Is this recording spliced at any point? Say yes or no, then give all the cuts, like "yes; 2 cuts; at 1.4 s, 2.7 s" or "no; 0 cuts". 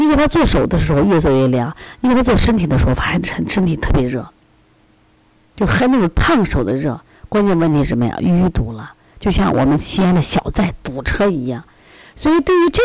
no; 0 cuts